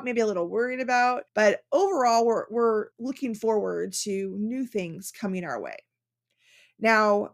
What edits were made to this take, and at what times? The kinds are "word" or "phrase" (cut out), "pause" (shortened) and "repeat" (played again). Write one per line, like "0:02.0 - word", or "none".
0:01.3 - pause
0:02.9 - pause